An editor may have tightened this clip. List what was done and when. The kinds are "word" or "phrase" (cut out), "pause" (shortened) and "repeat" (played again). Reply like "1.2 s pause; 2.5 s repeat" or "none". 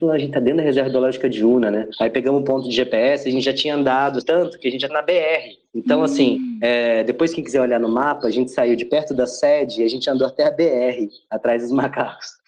4.2 s word; 4.9 s word